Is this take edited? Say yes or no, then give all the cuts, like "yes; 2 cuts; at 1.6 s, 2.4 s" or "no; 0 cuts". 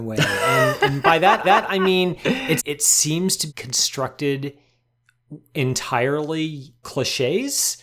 yes; 4 cuts; at 1.4 s, 2.6 s, 3.5 s, 6.8 s